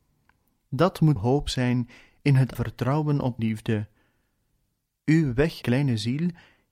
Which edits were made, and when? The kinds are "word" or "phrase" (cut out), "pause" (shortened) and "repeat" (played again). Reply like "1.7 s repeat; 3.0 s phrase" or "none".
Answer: 1.2 s word; 2.5 s word; 3.4 s word; 5.6 s word